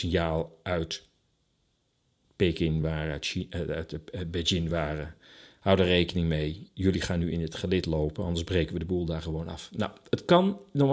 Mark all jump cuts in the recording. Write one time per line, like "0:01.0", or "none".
none